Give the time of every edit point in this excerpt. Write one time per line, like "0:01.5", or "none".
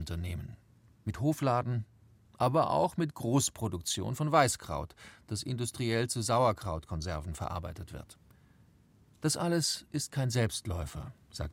none